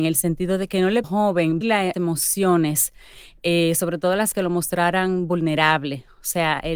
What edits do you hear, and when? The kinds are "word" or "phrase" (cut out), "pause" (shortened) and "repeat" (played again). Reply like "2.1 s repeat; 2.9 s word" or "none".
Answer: 1.0 s phrase; 1.6 s word; 1.9 s word; 4.3 s word

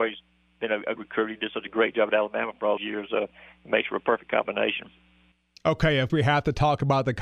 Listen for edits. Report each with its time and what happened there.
1.0 s word; 2.8 s word; 6.1 s word

